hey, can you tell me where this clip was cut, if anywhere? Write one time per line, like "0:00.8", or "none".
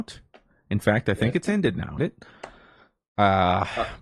0:02.0